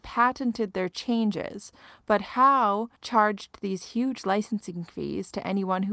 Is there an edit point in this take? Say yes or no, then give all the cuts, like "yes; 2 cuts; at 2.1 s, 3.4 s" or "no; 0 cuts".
yes; 1 cut; at 3.0 s